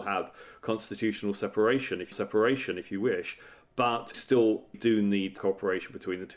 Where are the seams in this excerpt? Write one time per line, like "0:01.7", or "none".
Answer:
0:02.1
0:04.1
0:04.7
0:05.4